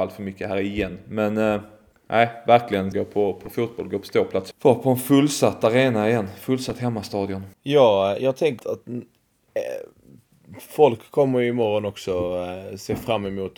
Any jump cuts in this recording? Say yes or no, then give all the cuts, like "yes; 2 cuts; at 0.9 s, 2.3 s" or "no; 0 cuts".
yes; 5 cuts; at 1.9 s, 2.9 s, 4.5 s, 7.5 s, 8.6 s